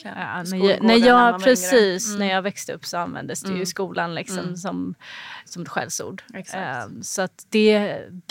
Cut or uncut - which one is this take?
cut